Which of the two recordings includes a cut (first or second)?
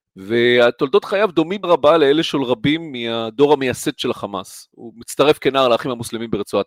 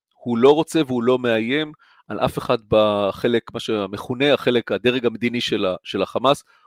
first